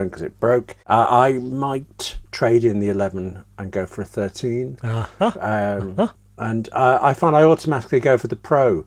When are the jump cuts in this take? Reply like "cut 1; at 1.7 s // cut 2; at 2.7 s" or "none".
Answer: none